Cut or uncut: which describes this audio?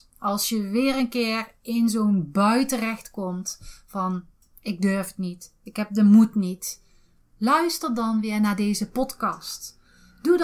uncut